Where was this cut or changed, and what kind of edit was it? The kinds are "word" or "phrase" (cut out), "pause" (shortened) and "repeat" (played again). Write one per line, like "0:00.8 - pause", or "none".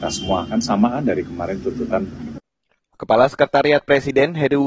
0:02.1 - phrase